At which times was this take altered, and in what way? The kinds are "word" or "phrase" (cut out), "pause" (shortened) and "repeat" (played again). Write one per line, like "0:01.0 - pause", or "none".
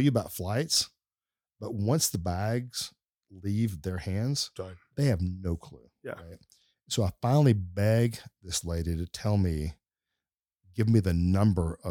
none